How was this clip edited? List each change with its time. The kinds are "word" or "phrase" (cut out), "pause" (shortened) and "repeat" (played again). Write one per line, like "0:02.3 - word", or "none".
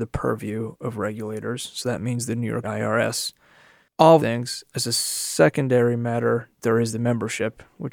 0:02.6 - phrase
0:04.2 - word